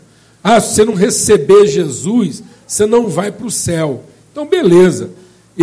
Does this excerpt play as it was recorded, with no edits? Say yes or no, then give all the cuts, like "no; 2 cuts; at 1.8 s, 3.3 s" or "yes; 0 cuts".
yes; 0 cuts